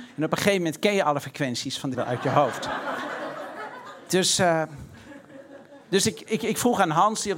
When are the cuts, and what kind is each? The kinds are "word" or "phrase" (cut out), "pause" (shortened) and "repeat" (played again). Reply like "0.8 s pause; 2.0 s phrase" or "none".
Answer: 1.9 s word